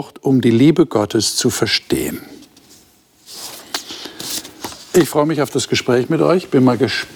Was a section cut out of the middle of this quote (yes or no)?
no